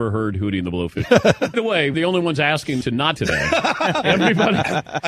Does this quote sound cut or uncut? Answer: cut